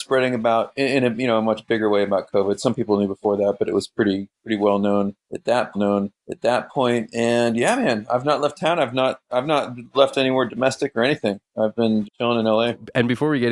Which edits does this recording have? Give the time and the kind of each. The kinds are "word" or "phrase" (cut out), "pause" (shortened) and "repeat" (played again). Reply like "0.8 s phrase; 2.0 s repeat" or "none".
4.3 s pause; 5.7 s repeat; 12.0 s word